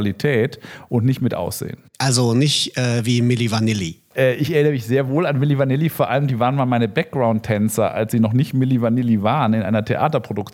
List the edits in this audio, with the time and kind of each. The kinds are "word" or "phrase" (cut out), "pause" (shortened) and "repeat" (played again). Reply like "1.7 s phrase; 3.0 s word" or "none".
none